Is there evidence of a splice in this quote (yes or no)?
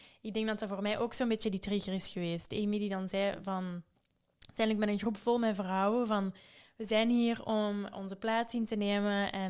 yes